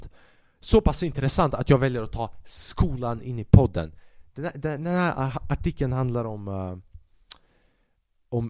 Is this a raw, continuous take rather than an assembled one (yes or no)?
yes